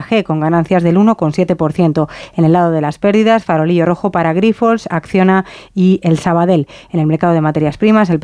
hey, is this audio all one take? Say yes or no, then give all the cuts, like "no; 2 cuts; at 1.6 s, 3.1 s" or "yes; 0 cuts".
yes; 0 cuts